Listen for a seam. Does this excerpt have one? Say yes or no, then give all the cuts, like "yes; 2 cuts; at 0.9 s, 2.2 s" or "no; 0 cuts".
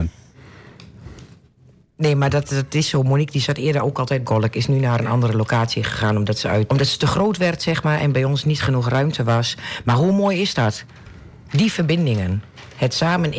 yes; 2 cuts; at 4.2 s, 6.7 s